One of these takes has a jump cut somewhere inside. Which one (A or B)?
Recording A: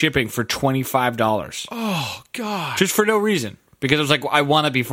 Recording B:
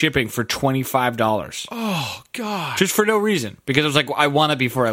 B